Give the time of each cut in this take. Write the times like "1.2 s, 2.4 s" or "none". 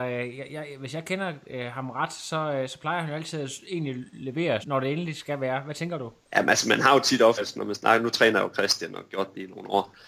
4.6 s, 6.2 s